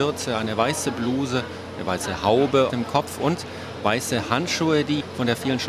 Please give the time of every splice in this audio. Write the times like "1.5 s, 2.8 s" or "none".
2.7 s